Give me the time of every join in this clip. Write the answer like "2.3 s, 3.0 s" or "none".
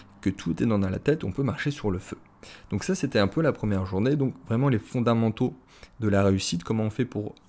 none